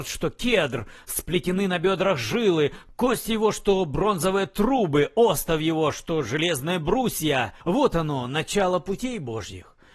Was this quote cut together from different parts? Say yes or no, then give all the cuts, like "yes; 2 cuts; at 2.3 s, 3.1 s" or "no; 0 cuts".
yes; 1 cut; at 7.6 s